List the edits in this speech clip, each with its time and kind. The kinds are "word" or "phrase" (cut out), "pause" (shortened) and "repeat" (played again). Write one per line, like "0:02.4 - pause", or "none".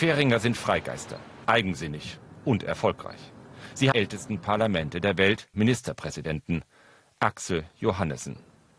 0:01.4 - word
0:03.9 - phrase
0:05.5 - phrase